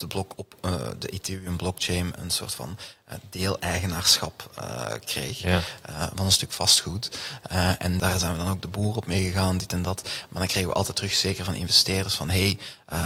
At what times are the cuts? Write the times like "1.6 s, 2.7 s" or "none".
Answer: 2.2 s, 8.0 s